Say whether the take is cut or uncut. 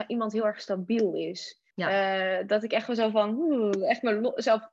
cut